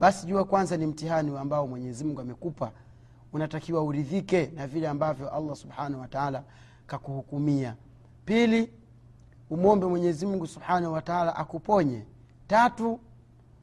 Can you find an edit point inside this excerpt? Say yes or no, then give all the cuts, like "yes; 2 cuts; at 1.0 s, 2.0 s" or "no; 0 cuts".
no; 0 cuts